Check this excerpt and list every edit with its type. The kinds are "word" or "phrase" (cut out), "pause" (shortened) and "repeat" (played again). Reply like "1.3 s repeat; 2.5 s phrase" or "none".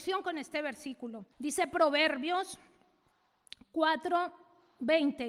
1.3 s pause

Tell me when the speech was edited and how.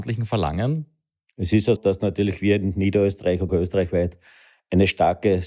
1.8 s word; 3.5 s word

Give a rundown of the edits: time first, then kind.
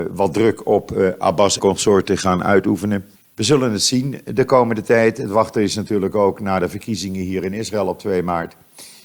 1.6 s word; 3.2 s pause

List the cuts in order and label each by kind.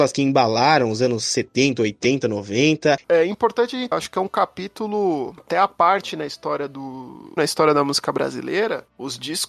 3.9 s word; 7.4 s phrase

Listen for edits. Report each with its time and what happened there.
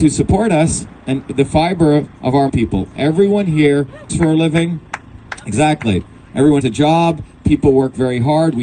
1.2 s word; 2.1 s pause; 2.5 s phrase; 4.1 s word; 6.6 s word

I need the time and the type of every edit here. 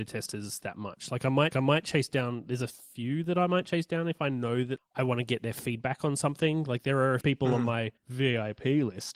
1.5 s repeat; 4.8 s word; 7.2 s word; 8.0 s pause

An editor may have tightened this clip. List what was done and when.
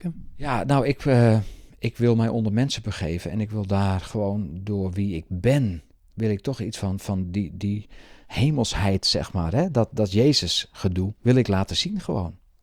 6.0 s pause; 11.2 s pause

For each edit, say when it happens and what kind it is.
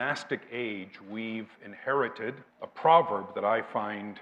2.5 s pause

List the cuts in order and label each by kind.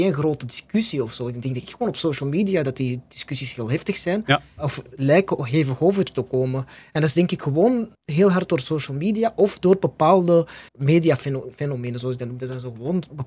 7.9 s pause; 10.7 s pause

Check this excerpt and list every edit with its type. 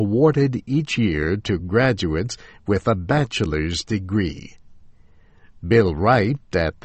none

